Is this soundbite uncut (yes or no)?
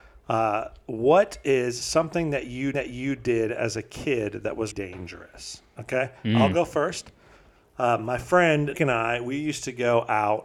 no